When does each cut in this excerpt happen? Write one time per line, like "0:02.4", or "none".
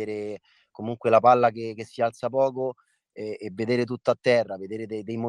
none